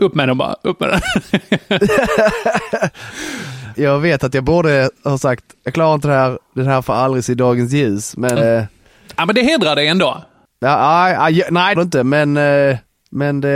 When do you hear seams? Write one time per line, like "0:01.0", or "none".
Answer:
0:03.7
0:08.4
0:11.8